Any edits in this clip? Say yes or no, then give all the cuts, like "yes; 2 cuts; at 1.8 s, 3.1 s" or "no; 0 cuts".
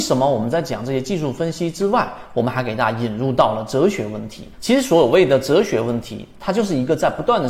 yes; 1 cut; at 4.5 s